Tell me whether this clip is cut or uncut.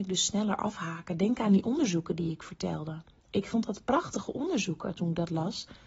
uncut